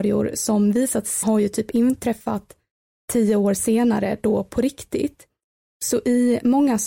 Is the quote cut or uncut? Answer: cut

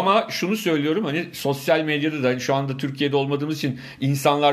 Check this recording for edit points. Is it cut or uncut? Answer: uncut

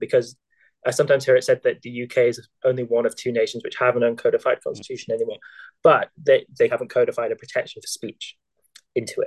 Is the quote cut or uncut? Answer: cut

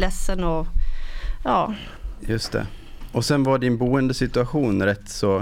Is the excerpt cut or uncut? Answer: uncut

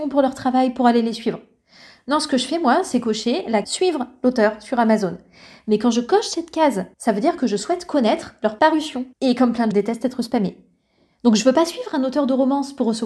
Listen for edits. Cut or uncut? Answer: cut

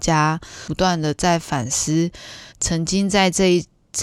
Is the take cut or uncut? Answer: cut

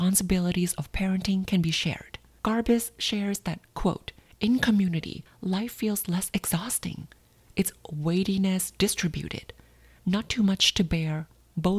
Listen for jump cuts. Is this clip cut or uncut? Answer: uncut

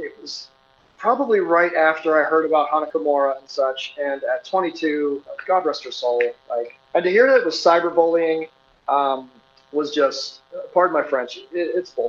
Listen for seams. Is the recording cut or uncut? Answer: cut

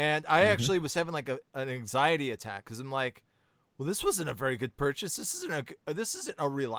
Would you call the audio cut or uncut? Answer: uncut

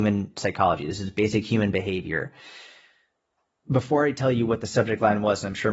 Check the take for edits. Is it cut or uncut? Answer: uncut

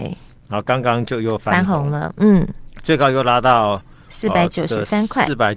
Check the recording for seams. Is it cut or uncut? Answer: uncut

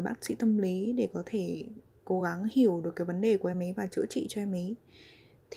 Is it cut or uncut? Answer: uncut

